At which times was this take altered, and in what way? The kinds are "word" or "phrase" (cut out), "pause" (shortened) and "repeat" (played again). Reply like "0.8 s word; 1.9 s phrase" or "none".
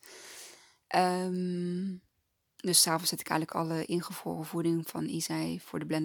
none

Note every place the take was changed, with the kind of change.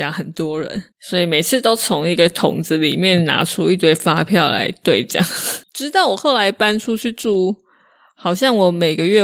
0.9 s pause; 5.7 s pause

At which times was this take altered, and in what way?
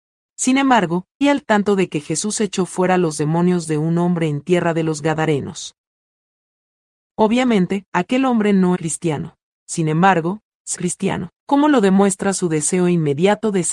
1.2 s word; 7.9 s pause; 8.7 s word; 10.7 s word

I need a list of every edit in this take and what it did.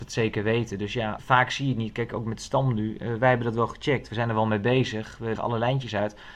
1.2 s word; 5.4 s word

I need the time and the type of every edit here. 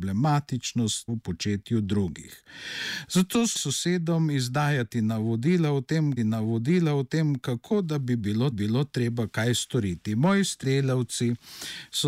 1.1 s word; 3.5 s word; 6.2 s repeat; 8.5 s repeat; 10.6 s word

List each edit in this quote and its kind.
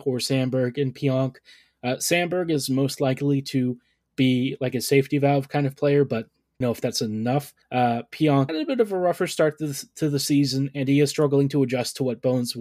6.6 s phrase; 7.6 s pause; 8.5 s phrase

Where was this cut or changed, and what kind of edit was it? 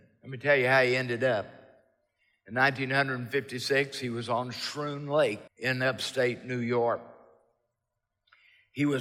5.5 s pause

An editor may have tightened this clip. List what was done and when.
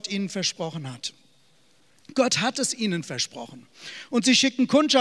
none

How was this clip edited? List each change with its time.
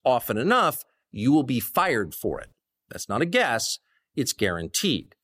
none

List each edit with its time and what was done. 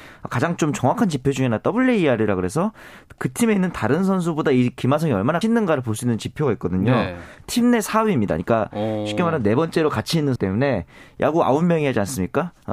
5.4 s word; 10.4 s word

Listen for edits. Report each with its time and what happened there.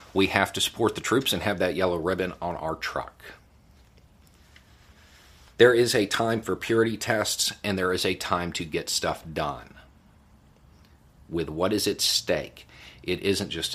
none

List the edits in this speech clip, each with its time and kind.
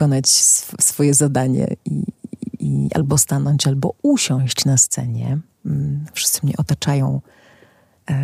none

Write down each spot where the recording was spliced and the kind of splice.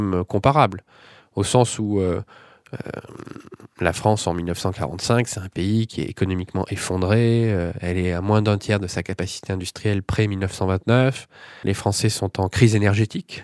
11.6 s word

